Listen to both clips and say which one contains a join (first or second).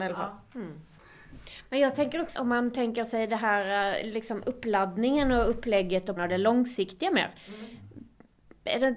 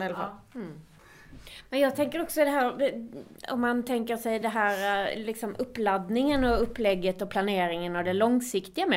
first